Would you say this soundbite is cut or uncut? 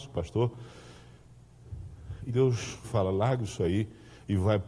cut